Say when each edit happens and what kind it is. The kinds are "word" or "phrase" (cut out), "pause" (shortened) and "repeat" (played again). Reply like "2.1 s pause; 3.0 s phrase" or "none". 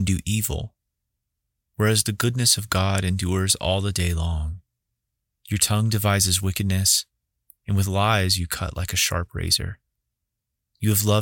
none